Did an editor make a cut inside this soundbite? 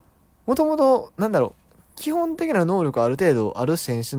yes; 1 cut; at 1.9 s

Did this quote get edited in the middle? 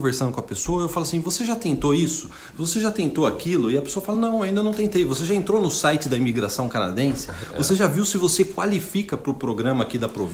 no; 0 cuts

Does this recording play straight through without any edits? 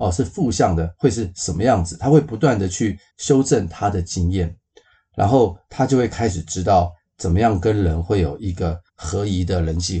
no; 2 cuts; at 3.1 s, 8.9 s

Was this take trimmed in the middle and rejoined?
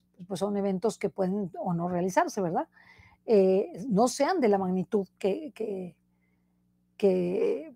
no; 0 cuts

